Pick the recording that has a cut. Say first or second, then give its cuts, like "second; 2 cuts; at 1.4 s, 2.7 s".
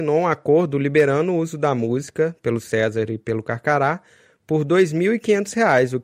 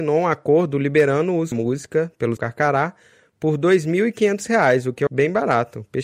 second; 3 cuts; at 1.5 s, 2.4 s, 5.1 s